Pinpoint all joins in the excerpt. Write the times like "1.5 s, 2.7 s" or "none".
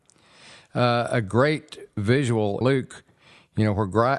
2.6 s